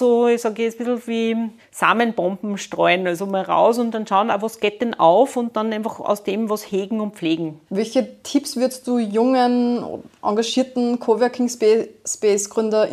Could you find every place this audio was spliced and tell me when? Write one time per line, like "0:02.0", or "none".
0:01.6
0:07.7